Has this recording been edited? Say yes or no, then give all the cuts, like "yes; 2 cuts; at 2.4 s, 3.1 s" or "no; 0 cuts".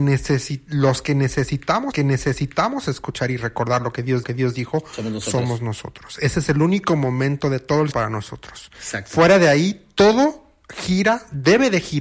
yes; 3 cuts; at 1.9 s, 4.2 s, 7.9 s